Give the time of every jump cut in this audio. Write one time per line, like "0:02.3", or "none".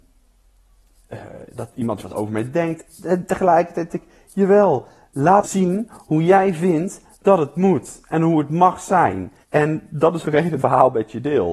0:02.0
0:03.9
0:05.4
0:09.4
0:10.2
0:10.6